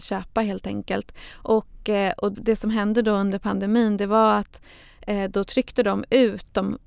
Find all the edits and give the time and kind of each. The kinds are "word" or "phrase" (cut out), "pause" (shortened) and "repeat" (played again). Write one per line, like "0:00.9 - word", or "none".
0:02.3 - word